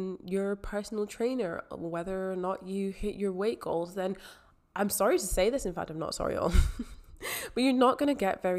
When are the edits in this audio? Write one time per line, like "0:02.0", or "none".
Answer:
none